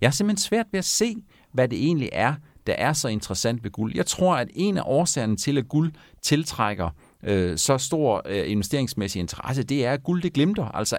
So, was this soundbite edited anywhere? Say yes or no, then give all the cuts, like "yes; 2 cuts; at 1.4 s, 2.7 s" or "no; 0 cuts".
no; 0 cuts